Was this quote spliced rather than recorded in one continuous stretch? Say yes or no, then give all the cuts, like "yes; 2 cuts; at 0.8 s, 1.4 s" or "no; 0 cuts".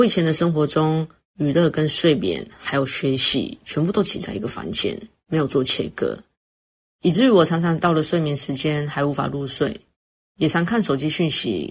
no; 0 cuts